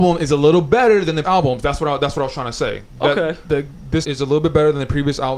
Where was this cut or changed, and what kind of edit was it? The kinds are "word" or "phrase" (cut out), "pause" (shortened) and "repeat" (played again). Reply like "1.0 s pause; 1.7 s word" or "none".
1.2 s word; 4.0 s word